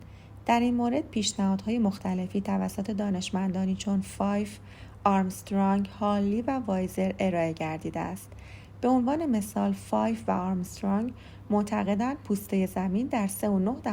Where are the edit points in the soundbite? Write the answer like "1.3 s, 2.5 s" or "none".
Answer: none

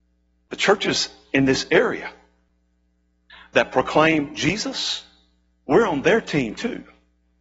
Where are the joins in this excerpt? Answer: none

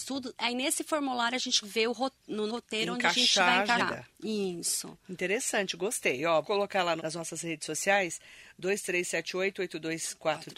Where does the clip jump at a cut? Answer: 1.6 s, 2.5 s, 3.8 s, 6.4 s, 7.0 s

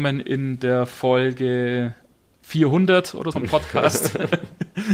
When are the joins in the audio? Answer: 3.3 s

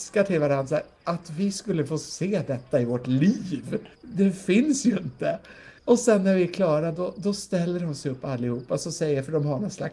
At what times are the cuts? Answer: 3.9 s, 5.8 s

